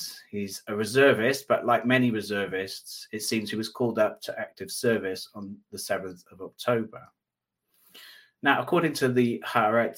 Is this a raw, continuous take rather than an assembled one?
yes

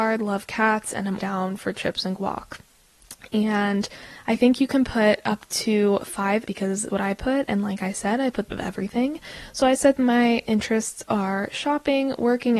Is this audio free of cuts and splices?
no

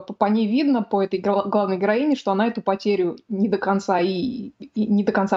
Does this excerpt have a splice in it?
no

